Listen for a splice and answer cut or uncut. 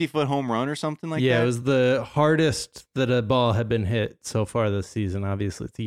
uncut